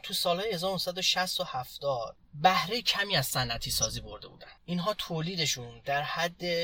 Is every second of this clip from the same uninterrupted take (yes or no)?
no